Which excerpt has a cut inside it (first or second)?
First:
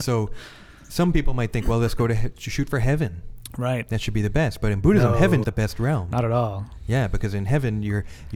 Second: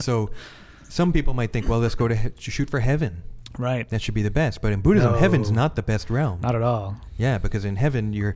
first